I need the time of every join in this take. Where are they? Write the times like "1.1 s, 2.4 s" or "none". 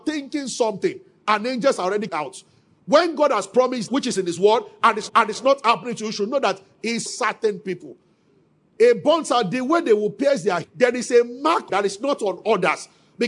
2.1 s, 3.9 s, 5.1 s, 7.1 s, 10.6 s, 11.7 s